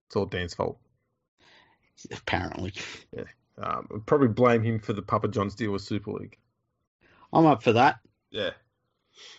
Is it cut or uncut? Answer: uncut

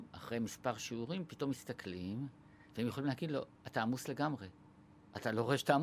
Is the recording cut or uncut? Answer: uncut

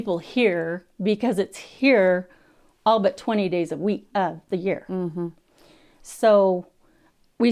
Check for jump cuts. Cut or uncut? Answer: uncut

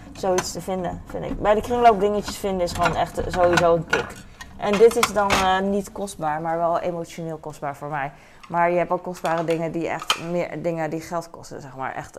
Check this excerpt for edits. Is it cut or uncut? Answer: uncut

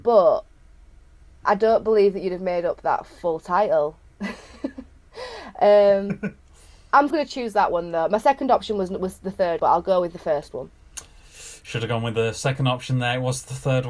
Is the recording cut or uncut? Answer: cut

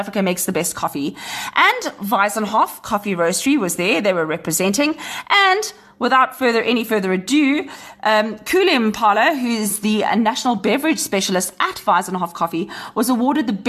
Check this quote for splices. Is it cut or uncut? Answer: uncut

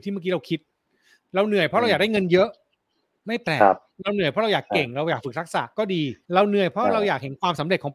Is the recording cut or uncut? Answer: cut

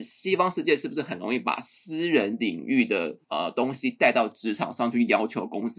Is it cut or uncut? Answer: cut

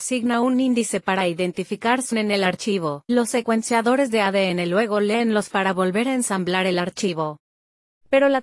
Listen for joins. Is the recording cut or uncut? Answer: cut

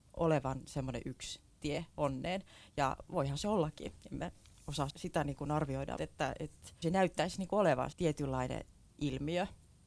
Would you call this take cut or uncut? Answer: cut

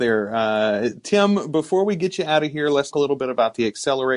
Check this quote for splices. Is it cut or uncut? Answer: cut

